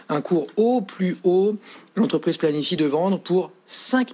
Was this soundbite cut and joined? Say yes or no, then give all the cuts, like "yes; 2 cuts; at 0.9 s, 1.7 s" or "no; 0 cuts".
no; 0 cuts